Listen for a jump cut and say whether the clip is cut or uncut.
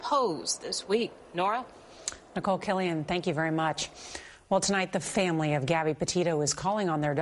uncut